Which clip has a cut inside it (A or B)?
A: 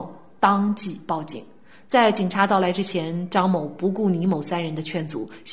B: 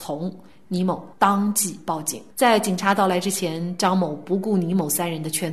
B